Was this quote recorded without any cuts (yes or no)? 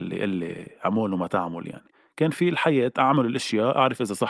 yes